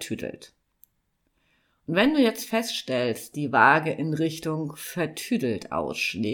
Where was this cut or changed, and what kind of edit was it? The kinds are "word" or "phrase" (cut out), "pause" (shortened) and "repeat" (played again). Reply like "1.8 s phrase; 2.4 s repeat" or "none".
3.3 s word